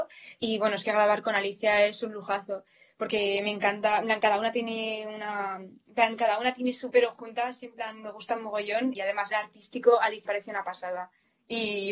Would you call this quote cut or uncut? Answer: cut